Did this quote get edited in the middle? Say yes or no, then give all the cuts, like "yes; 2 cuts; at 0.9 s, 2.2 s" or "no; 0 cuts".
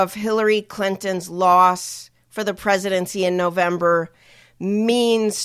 no; 0 cuts